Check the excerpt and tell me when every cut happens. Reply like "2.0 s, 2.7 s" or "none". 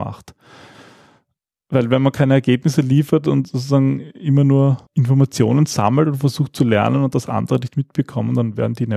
4.9 s